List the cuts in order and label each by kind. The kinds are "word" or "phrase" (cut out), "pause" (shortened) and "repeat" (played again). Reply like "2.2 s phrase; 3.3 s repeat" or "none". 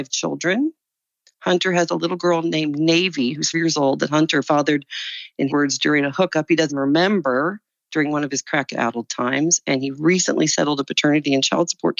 3.5 s word; 4.4 s word; 5.5 s word; 6.7 s word

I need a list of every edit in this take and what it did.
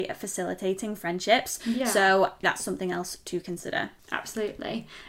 2.4 s word

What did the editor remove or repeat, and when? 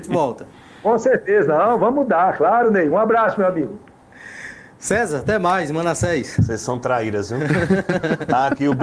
none

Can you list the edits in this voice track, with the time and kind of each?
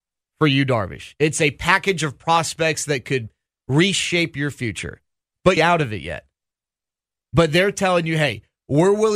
5.6 s phrase

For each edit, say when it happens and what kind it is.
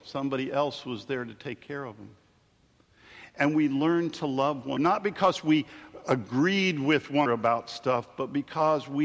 4.8 s word; 7.3 s word

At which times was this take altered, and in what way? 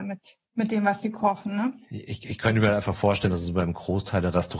none

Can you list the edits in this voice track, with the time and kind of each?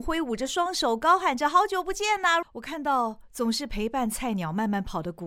2.4 s word

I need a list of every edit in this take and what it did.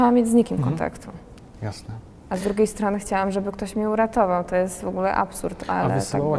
none

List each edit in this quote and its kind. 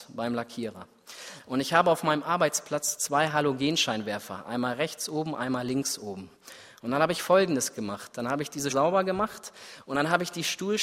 8.7 s word

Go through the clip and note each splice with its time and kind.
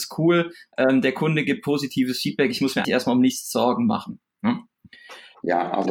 2.8 s word

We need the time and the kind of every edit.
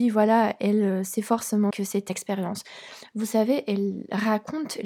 1.7 s word; 2.1 s phrase

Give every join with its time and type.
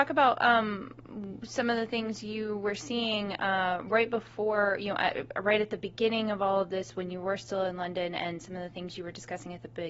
none

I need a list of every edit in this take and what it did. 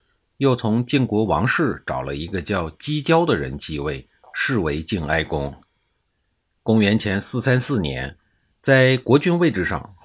none

